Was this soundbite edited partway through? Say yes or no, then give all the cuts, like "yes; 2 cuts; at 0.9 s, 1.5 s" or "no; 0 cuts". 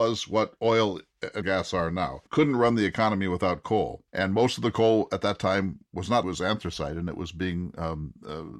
yes; 4 cuts; at 1.4 s, 2.3 s, 4.1 s, 6.2 s